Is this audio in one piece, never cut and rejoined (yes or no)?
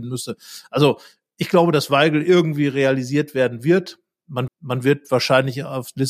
no